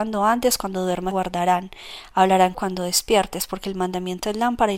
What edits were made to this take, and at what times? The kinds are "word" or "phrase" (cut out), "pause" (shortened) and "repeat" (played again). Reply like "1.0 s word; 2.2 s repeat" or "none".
1.1 s word; 2.5 s word

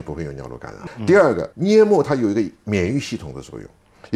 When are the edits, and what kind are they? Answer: 1.5 s pause

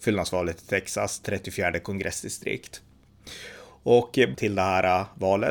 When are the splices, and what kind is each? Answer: 4.3 s word

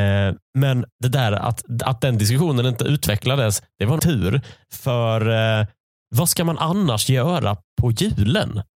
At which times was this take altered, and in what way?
0.9 s pause; 4.0 s word

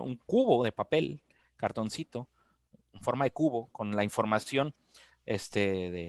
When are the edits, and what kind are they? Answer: none

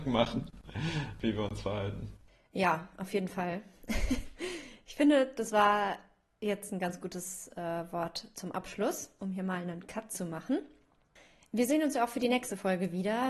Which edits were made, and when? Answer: none

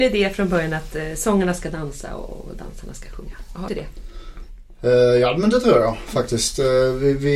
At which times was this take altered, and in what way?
3.7 s phrase

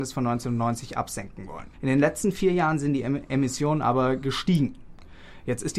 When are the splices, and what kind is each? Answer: 1.7 s pause

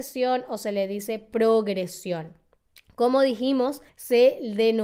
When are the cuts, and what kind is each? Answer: 2.8 s pause; 3.9 s pause

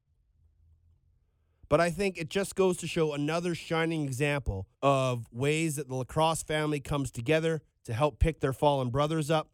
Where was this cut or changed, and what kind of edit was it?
4.7 s pause; 7.7 s pause

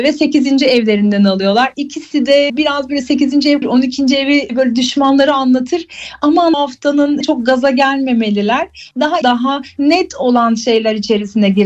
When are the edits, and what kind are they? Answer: 2.5 s word; 3.6 s phrase; 4.5 s word; 6.5 s phrase; 7.2 s word; 9.2 s word

